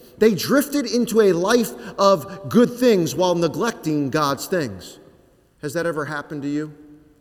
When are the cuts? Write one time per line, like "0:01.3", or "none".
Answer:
none

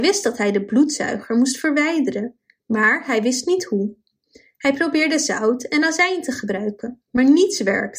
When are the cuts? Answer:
none

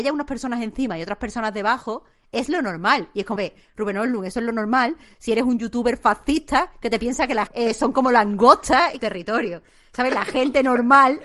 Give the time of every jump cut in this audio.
0:03.4
0:07.5
0:09.0

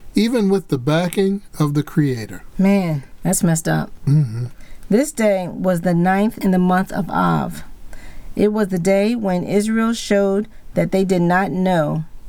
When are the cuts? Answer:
0:06.4

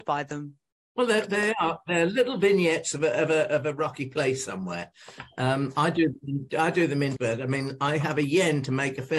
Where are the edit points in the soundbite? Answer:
0:06.5
0:07.2

